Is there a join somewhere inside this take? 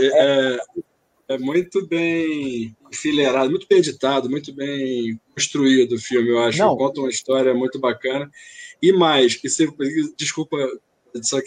yes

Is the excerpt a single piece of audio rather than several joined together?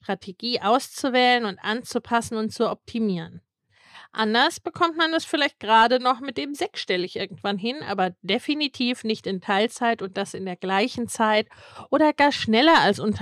yes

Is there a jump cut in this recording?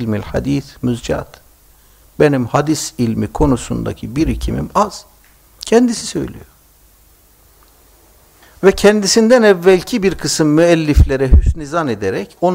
no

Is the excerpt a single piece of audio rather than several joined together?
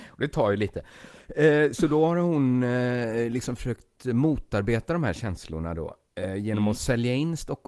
yes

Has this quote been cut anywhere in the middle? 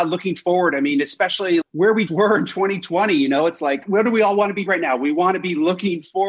yes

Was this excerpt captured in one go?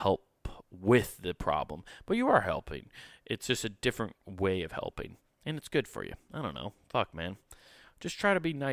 yes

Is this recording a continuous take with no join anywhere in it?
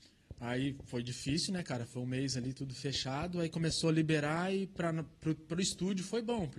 yes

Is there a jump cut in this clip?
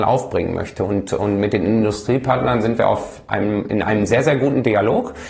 no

